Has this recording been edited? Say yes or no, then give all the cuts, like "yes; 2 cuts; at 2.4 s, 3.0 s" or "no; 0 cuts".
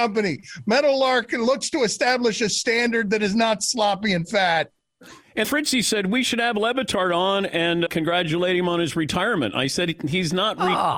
yes; 2 cuts; at 5.4 s, 7.9 s